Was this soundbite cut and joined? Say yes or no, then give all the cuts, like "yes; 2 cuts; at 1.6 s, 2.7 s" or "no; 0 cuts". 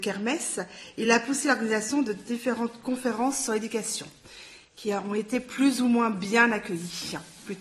no; 0 cuts